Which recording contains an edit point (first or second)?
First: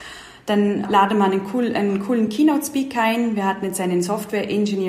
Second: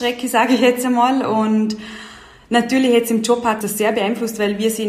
second